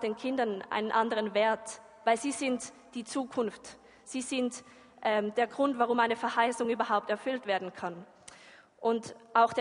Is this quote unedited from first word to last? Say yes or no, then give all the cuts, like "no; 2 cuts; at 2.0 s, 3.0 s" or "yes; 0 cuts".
yes; 0 cuts